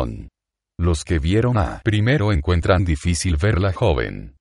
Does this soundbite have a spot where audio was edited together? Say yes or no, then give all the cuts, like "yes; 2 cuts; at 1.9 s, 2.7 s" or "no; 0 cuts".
no; 0 cuts